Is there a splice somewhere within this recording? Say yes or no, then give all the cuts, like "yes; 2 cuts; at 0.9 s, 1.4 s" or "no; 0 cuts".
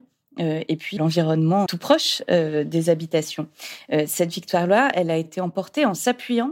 yes; 2 cuts; at 1.0 s, 1.7 s